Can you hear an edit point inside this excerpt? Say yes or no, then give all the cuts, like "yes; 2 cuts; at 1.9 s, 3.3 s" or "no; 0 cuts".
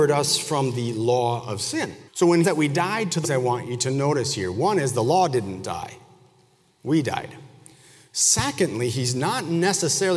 yes; 3 cuts; at 2.1 s, 2.4 s, 3.2 s